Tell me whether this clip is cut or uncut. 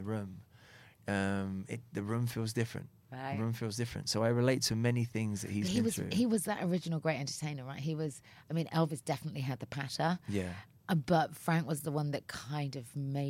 uncut